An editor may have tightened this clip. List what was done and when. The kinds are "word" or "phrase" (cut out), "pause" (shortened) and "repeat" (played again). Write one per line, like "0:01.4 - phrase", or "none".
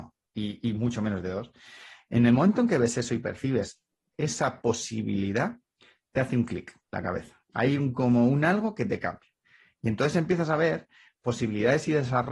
none